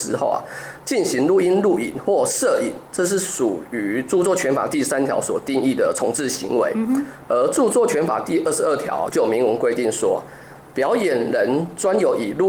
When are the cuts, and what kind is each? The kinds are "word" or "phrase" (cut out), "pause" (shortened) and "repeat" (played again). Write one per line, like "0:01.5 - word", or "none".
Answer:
none